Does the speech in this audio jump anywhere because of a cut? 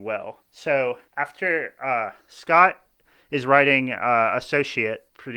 no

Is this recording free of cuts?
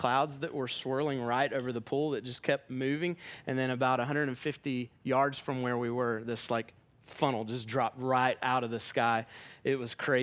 yes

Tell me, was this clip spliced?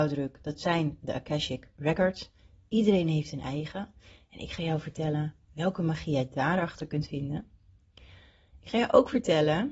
no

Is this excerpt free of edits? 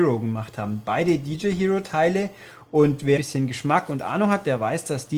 no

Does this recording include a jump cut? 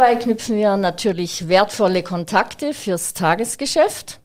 no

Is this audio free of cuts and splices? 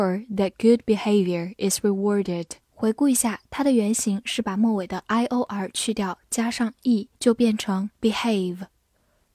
no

